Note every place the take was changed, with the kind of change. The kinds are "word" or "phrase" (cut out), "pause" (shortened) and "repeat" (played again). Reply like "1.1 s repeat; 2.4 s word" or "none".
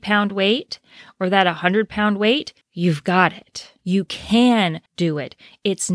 2.6 s pause; 3.8 s pause; 4.9 s pause

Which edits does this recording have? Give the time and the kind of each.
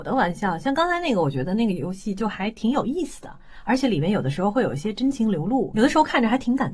5.7 s word

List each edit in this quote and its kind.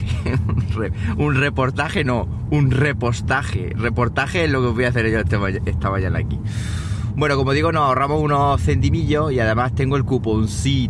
none

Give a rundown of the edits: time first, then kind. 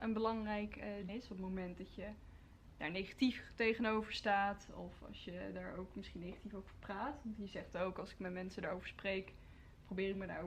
1.1 s phrase

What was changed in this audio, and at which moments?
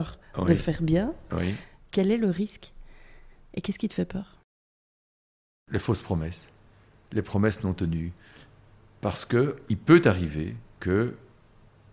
6.7 s pause

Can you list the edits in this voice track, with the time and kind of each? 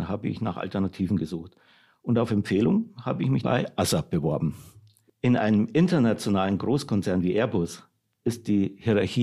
3.4 s word

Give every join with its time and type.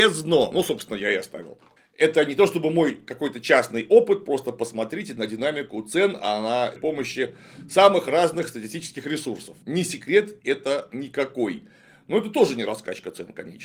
1.8 s pause; 6.8 s phrase; 9.6 s pause

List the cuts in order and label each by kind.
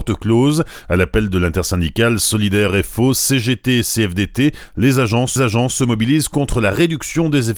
5.4 s repeat

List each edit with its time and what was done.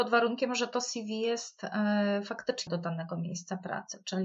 2.7 s word

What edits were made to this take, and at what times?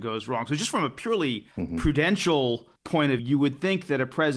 1.5 s pause; 2.8 s pause; 3.2 s word

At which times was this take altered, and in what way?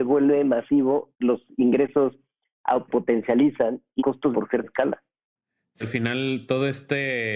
1.1 s word; 2.9 s word; 4.0 s word; 4.3 s word; 4.6 s word; 5.8 s word

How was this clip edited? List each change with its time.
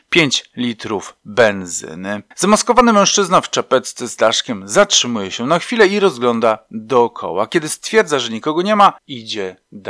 2.3 s pause; 9.0 s pause

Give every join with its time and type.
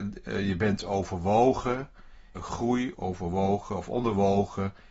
2.3 s word; 2.9 s word

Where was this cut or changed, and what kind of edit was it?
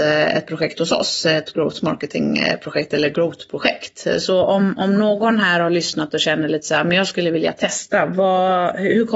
none

